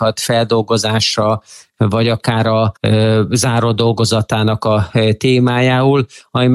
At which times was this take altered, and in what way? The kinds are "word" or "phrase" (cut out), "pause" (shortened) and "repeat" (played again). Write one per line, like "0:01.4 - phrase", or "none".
0:02.8 - pause